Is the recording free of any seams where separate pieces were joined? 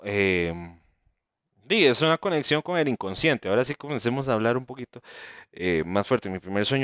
yes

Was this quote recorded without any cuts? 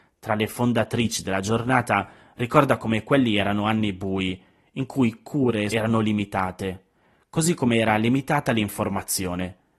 no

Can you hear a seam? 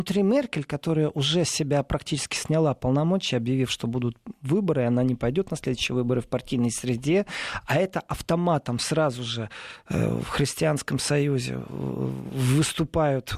no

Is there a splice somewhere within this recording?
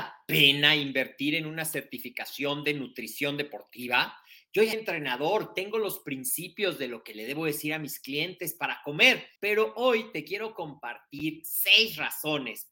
yes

